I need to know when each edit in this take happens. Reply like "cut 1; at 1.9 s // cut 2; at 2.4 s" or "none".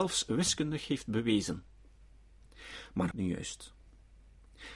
cut 1; at 3.1 s